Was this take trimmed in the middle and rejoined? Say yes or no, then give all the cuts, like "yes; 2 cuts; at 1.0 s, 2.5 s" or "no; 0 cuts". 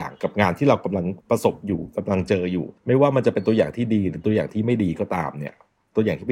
yes; 2 cuts; at 1.2 s, 2.8 s